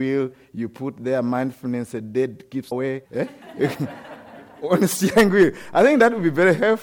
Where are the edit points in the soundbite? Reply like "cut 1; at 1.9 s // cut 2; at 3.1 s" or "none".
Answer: cut 1; at 2.7 s // cut 2; at 3.1 s